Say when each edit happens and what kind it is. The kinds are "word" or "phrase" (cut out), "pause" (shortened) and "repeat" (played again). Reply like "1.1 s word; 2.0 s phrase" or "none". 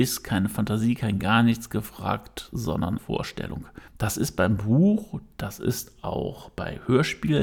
3.0 s phrase; 3.9 s pause